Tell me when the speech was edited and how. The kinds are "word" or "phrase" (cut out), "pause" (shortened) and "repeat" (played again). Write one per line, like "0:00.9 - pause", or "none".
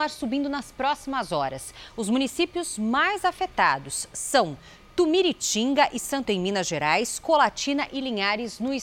0:06.2 - word